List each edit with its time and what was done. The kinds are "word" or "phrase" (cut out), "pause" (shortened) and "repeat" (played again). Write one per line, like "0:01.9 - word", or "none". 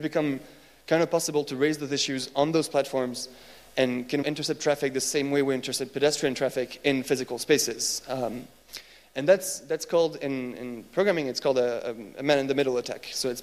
0:04.2 - phrase